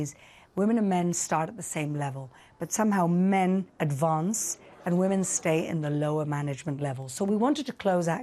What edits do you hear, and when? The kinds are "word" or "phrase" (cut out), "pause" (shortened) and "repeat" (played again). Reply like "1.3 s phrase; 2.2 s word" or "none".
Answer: 3.7 s pause